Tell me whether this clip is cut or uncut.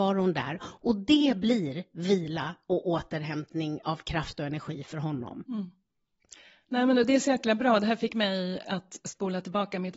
uncut